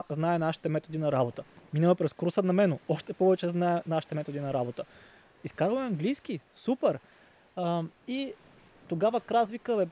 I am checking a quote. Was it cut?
no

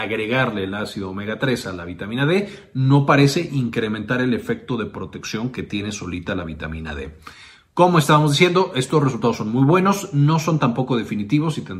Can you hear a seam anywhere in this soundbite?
no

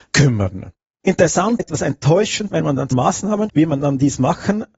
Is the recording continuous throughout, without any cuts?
no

